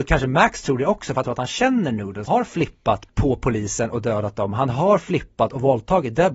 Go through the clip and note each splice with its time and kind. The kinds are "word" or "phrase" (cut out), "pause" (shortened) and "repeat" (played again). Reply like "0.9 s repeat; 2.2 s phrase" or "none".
1.2 s word; 2.3 s word; 3.1 s word